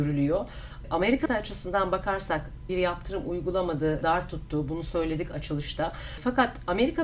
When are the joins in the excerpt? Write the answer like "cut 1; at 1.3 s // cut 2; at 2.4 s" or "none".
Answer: cut 1; at 1.3 s // cut 2; at 2.7 s // cut 3; at 4.0 s